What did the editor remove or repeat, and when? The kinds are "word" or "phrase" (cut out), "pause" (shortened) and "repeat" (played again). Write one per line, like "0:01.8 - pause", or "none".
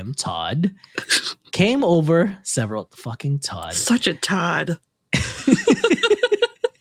none